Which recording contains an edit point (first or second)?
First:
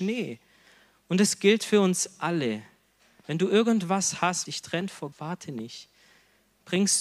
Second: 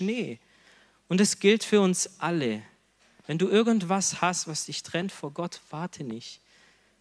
first